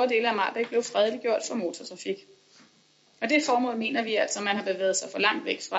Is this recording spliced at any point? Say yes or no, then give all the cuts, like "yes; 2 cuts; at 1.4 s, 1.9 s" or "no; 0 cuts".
no; 0 cuts